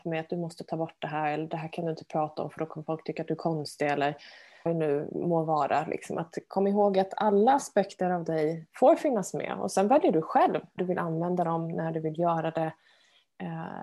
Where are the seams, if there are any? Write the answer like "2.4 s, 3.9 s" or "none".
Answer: 4.7 s, 10.8 s